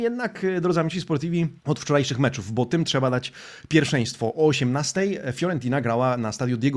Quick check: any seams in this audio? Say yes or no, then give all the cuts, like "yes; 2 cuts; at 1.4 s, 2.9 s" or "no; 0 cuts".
yes; 1 cut; at 1.6 s